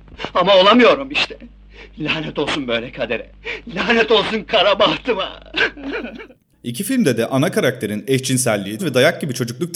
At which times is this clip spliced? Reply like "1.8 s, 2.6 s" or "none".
8.8 s